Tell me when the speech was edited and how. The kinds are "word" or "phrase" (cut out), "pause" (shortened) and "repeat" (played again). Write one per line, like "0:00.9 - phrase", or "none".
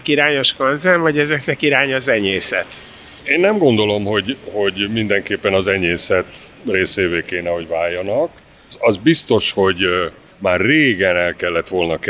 none